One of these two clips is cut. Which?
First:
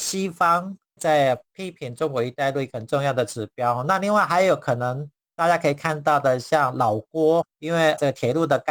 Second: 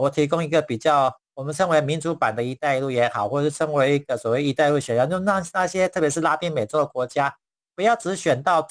first; 1 cut; at 7.5 s

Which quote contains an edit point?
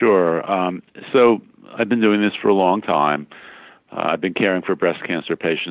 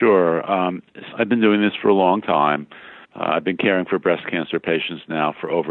second; 2 cuts; at 1.1 s, 3.0 s

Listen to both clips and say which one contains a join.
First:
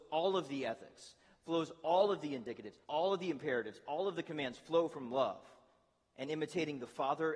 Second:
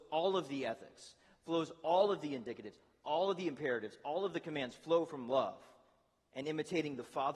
first; 1 cut; at 2.8 s

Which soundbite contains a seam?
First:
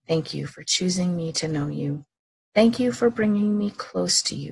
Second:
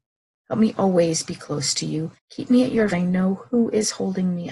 second; 2 cuts; at 2.2 s, 2.9 s

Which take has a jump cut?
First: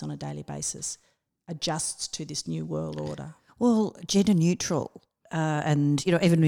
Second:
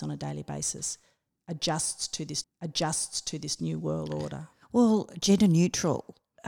second; 1 cut; at 2.4 s

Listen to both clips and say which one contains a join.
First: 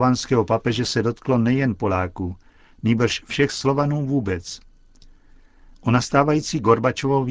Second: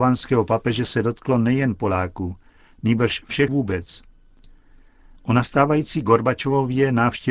second; 1 cut; at 3.5 s

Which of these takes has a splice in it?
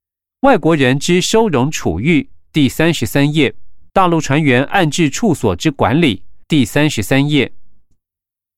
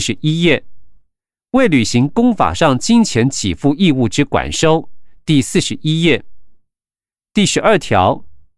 first; 2 cuts; at 3.9 s, 6.4 s

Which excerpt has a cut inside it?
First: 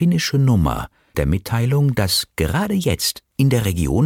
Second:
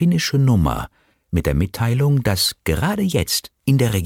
first; 1 cut; at 1.1 s

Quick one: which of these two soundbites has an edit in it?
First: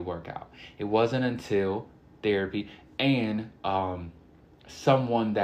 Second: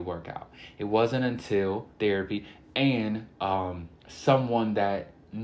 second; 2 cuts; at 1.9 s, 4.0 s

